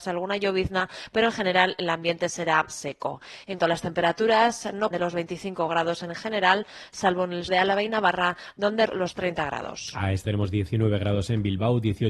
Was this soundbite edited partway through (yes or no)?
yes